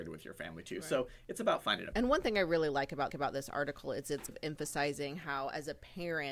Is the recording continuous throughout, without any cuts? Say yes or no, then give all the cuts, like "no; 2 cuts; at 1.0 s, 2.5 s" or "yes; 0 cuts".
no; 3 cuts; at 1.9 s, 3.1 s, 4.3 s